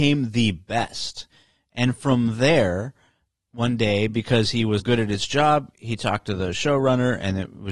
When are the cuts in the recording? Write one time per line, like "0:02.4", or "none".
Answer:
0:04.8